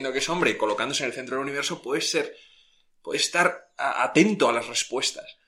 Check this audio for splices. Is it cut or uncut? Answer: uncut